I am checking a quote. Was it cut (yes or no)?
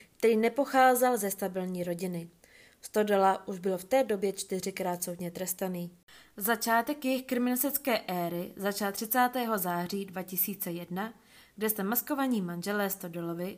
no